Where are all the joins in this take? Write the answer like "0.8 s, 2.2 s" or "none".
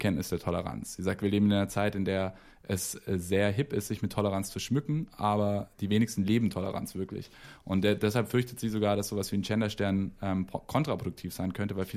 none